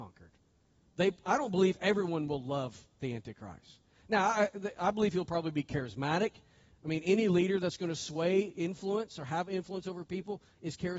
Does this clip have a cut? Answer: no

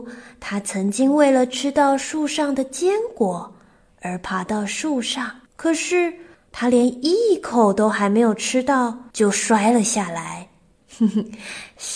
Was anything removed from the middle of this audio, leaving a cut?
yes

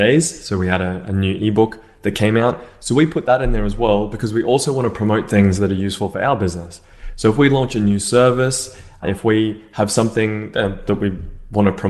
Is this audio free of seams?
yes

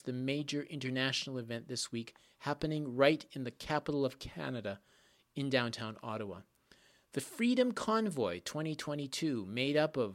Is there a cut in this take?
no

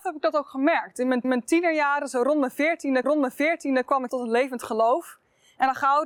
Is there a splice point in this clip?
yes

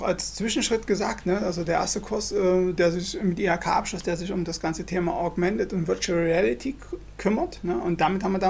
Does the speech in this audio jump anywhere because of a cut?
no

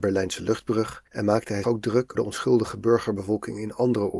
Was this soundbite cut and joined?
yes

